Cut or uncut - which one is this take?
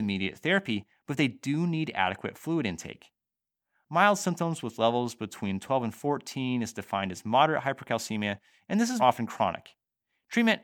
cut